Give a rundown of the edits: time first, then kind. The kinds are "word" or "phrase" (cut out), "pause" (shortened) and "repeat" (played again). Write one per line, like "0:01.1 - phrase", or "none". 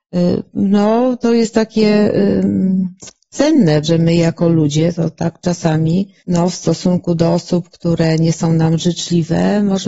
0:03.8 - phrase
0:06.2 - pause